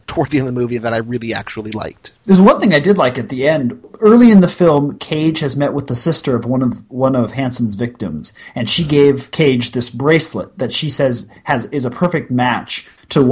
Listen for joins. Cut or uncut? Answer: uncut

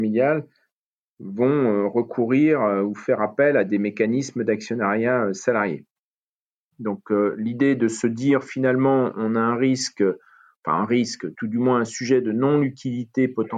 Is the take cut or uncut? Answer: cut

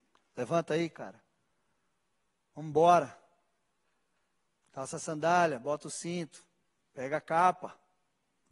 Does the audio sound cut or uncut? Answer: uncut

